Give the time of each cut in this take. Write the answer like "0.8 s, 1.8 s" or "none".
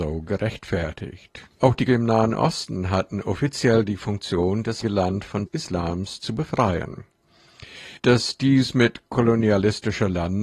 1.5 s, 1.9 s, 4.8 s, 5.5 s, 8.0 s